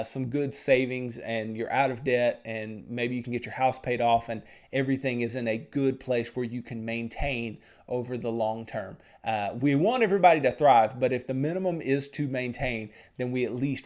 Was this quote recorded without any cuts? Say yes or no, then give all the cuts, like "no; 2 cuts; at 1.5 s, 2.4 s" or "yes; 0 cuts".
yes; 0 cuts